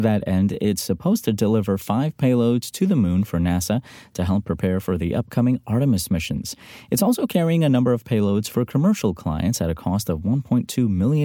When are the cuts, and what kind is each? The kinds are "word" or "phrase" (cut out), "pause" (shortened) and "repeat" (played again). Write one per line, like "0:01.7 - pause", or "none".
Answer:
none